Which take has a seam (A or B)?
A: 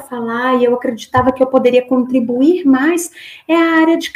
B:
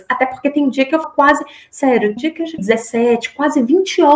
B